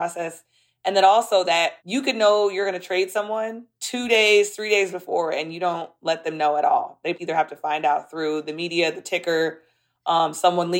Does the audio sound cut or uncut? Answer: cut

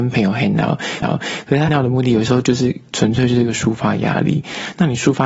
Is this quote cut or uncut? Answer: cut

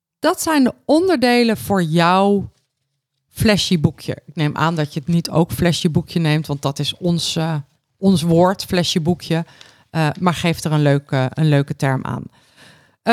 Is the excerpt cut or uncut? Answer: uncut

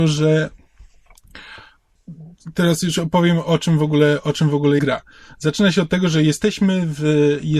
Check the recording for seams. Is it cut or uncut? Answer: cut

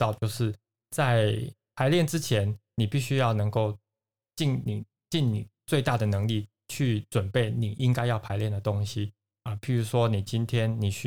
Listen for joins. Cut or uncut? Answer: uncut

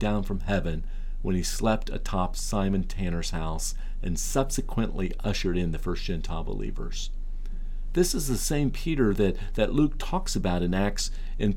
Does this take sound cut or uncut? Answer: uncut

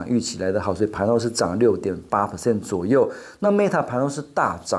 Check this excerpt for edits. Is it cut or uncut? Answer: uncut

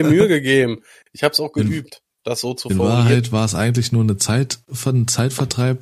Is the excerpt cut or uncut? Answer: uncut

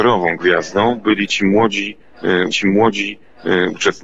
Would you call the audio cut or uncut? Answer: cut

